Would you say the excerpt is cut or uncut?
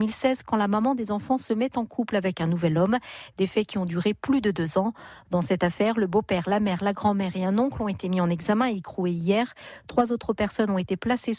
uncut